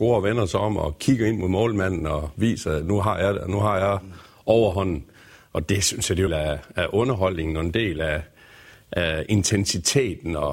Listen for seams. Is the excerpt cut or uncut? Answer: cut